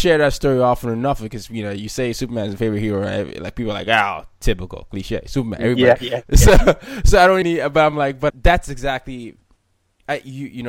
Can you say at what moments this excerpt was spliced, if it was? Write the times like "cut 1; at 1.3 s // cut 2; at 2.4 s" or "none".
cut 1; at 7.4 s // cut 2; at 8.3 s